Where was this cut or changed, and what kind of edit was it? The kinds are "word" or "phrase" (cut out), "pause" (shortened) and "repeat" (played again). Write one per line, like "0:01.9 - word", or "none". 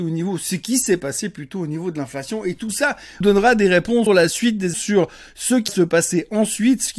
0:03.2 - word
0:04.1 - word
0:04.7 - word
0:05.7 - word